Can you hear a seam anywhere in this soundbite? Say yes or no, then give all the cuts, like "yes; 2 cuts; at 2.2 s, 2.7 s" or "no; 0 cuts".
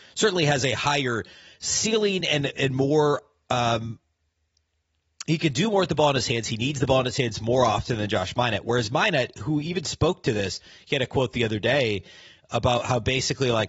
no; 0 cuts